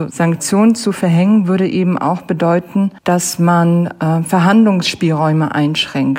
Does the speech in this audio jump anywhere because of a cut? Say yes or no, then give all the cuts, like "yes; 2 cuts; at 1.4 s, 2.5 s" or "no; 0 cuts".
yes; 1 cut; at 3.0 s